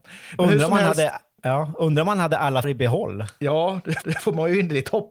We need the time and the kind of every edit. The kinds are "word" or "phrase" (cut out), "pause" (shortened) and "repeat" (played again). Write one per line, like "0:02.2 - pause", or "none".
0:02.6 - word
0:04.0 - repeat